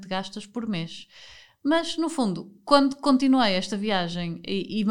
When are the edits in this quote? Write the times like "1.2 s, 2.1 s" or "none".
none